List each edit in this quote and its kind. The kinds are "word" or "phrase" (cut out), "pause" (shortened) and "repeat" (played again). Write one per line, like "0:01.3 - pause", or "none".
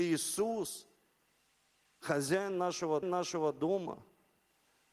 0:03.0 - repeat